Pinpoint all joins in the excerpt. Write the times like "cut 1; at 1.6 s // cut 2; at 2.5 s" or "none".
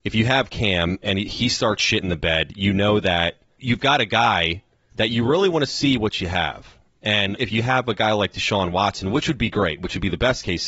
none